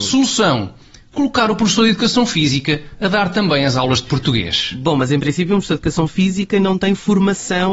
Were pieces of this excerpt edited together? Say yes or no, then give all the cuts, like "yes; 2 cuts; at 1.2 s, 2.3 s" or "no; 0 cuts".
no; 0 cuts